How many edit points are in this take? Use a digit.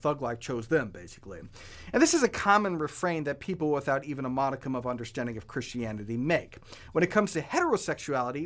0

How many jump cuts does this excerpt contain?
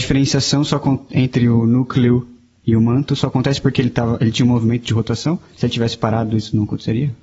0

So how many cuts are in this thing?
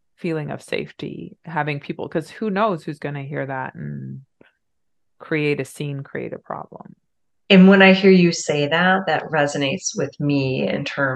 0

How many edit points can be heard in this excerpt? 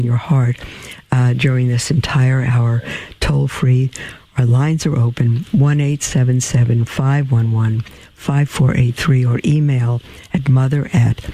0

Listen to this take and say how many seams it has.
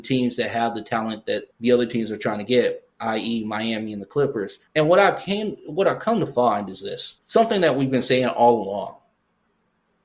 3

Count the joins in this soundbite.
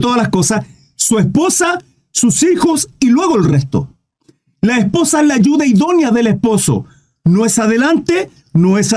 0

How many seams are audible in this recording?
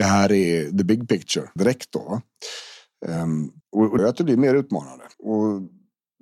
4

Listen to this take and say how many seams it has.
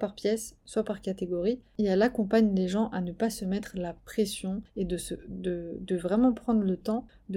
0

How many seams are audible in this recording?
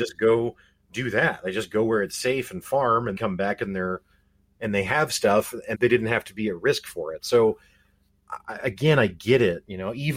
2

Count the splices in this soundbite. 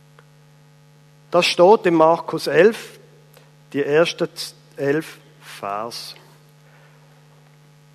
0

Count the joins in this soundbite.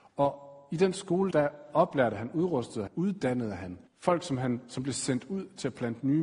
3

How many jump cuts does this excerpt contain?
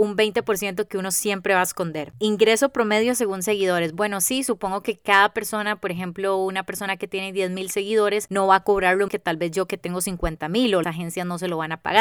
2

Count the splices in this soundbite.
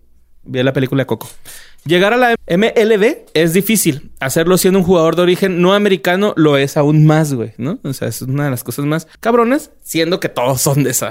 2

